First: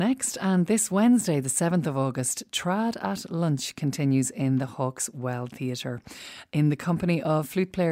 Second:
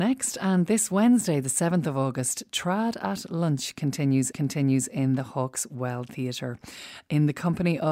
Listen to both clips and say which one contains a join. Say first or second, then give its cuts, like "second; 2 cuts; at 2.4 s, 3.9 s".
second; 1 cut; at 4.3 s